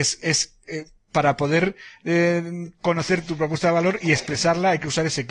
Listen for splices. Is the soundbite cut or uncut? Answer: uncut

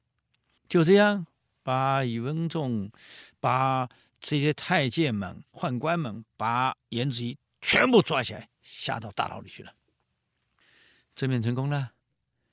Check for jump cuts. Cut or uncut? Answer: uncut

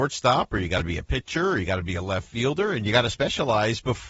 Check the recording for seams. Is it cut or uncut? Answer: uncut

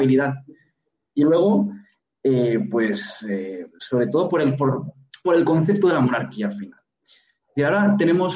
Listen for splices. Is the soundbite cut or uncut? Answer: cut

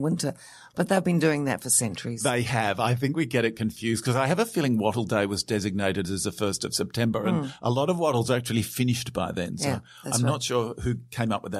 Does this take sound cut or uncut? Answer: uncut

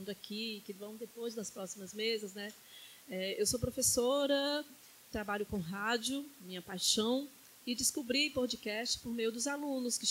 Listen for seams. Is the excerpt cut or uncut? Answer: uncut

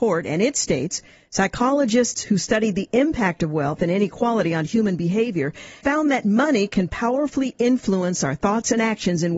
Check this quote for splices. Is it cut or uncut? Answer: cut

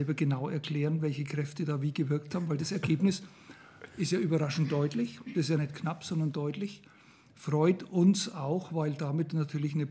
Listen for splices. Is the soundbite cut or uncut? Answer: uncut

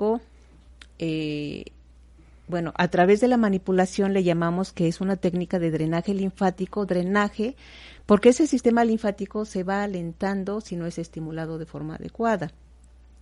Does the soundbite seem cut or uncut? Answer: uncut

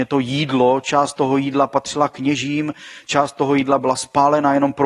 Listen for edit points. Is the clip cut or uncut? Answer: uncut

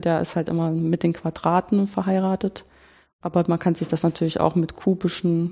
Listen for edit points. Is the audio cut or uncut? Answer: uncut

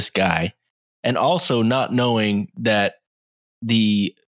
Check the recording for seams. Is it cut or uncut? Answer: uncut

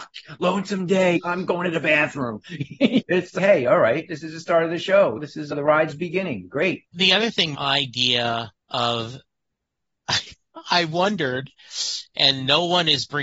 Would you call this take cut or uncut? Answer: cut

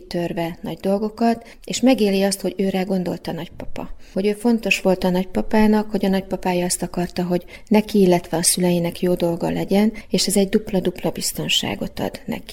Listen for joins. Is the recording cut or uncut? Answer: uncut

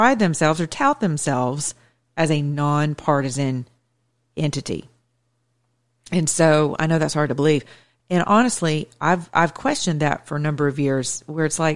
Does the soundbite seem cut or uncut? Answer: uncut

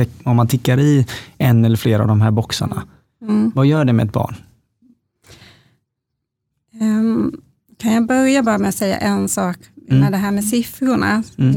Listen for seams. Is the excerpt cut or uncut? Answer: uncut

